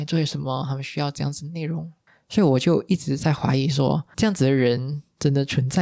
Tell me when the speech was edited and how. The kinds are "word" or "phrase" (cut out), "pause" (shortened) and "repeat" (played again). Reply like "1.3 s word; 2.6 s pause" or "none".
4.1 s word